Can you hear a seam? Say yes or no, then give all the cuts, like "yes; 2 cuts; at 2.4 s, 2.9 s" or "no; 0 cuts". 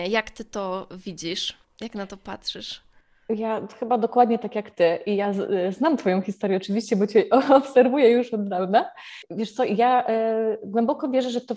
no; 0 cuts